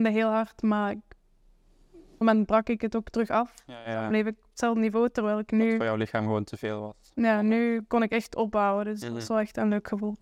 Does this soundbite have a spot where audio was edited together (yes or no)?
yes